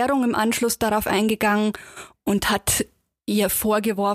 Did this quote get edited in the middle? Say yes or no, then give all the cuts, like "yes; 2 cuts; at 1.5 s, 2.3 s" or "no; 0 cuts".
no; 0 cuts